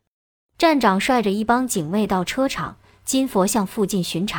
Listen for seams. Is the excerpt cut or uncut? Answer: uncut